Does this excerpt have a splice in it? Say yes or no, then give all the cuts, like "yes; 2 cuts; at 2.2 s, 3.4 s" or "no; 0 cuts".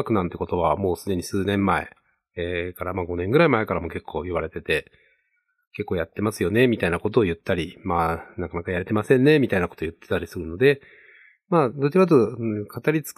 no; 0 cuts